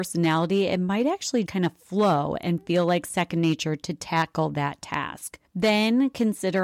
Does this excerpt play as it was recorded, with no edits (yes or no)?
no